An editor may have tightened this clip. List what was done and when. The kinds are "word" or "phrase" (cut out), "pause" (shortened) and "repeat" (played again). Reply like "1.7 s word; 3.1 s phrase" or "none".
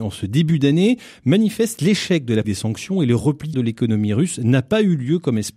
2.4 s word; 3.5 s word